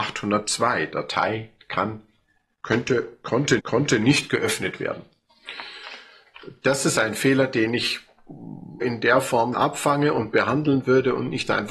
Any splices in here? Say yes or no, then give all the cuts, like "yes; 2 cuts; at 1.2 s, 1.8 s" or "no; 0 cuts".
yes; 4 cuts; at 1.6 s, 3.6 s, 8.8 s, 9.5 s